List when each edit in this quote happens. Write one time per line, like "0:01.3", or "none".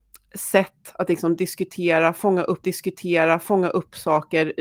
0:02.6